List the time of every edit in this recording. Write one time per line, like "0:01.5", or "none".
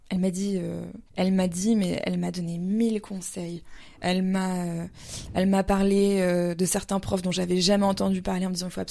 0:01.1